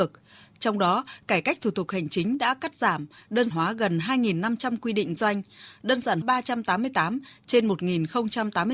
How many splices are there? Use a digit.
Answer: 3